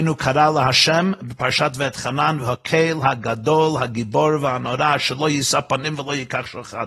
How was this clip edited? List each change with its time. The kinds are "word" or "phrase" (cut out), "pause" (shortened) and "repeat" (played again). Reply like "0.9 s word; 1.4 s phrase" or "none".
2.4 s word